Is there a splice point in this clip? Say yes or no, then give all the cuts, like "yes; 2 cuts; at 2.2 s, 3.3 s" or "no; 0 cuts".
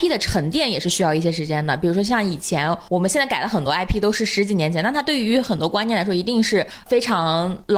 no; 0 cuts